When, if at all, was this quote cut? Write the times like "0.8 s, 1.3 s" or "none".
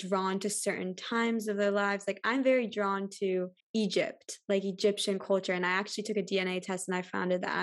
3.6 s